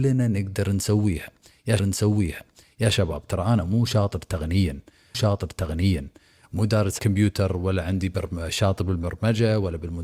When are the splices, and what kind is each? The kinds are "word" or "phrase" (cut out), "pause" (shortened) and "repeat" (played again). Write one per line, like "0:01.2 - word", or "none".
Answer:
0:01.8 - repeat
0:05.1 - repeat
0:07.0 - word